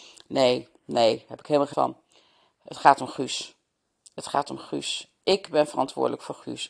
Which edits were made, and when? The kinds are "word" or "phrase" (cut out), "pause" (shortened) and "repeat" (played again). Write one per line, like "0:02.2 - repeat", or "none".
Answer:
0:01.7 - word